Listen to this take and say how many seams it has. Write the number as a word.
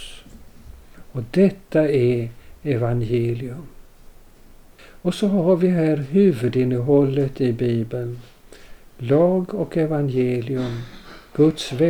zero